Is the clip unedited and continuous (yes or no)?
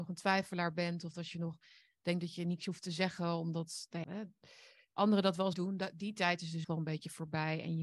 no